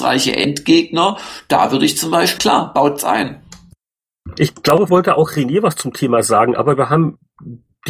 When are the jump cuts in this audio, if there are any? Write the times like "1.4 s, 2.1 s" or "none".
2.4 s, 4.9 s